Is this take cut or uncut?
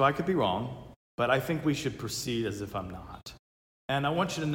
uncut